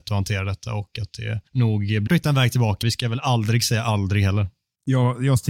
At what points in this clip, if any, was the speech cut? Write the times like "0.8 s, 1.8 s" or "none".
1.5 s, 2.1 s, 2.8 s